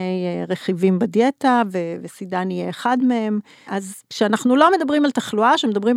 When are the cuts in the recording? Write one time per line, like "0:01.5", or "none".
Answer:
0:04.0